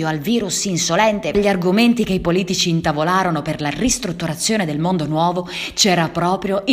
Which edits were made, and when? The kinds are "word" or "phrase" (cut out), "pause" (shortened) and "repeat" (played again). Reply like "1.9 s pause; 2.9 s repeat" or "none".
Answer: 1.3 s phrase